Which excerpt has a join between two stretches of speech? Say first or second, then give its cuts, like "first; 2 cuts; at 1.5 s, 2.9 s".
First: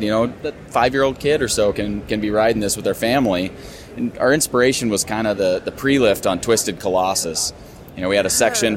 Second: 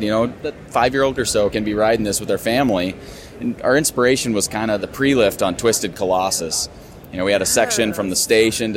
second; 3 cuts; at 1.2 s, 1.5 s, 4.8 s